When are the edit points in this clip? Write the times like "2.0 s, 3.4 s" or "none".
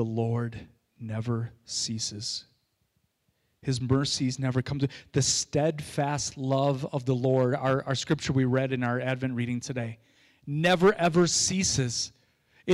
none